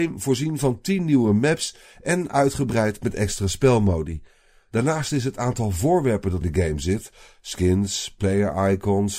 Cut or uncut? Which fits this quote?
cut